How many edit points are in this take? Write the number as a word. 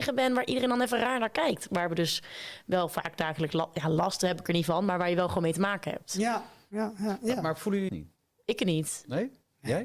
one